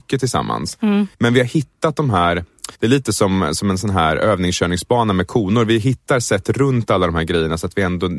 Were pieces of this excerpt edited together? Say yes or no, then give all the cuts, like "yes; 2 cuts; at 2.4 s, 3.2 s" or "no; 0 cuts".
yes; 2 cuts; at 1.1 s, 2.7 s